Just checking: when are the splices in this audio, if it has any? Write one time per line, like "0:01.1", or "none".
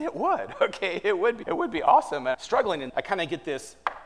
0:01.4
0:02.3
0:02.9